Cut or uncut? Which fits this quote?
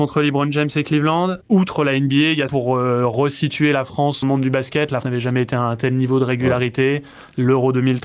cut